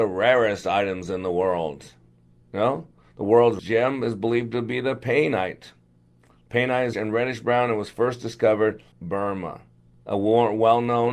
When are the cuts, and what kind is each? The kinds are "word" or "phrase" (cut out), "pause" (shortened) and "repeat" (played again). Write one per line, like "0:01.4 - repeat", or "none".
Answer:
0:03.6 - word
0:06.9 - word
0:08.9 - word